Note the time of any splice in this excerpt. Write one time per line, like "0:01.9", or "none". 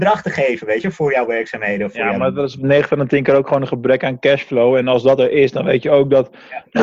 none